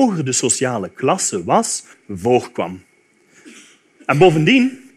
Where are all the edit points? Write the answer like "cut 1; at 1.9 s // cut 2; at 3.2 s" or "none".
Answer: cut 1; at 1.9 s